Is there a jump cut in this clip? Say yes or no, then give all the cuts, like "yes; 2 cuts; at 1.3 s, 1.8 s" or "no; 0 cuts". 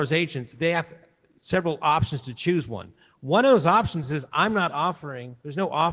no; 0 cuts